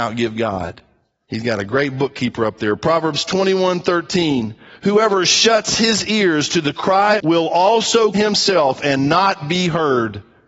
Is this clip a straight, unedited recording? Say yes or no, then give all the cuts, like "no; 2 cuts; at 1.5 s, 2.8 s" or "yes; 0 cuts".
no; 2 cuts; at 7.2 s, 8.1 s